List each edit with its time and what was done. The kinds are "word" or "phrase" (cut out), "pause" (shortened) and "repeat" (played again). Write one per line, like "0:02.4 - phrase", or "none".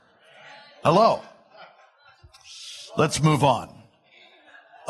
none